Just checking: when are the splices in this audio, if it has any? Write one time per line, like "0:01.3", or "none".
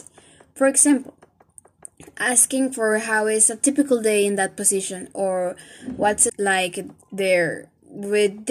0:06.3

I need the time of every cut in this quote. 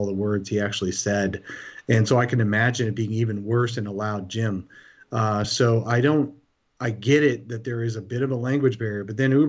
none

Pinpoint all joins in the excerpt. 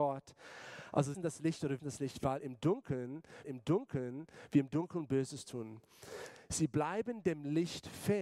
0:01.1
0:01.8
0:03.4

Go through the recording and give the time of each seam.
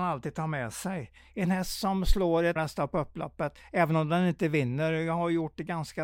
0:02.6

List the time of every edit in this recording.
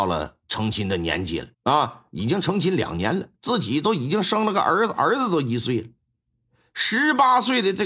0:01.5
0:03.4

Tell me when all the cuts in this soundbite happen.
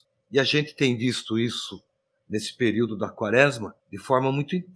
none

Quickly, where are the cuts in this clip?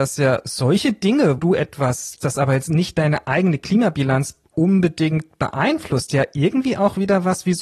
0:01.4
0:02.2

